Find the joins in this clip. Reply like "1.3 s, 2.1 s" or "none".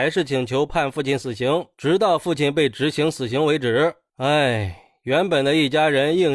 none